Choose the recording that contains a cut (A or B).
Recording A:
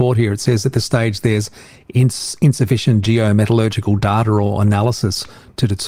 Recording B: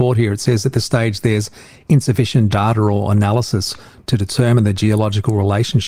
B